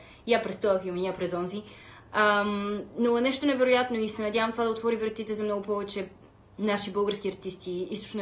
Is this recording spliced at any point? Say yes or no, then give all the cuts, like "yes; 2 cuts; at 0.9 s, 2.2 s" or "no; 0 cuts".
no; 0 cuts